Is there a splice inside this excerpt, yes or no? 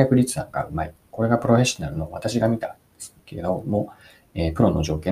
no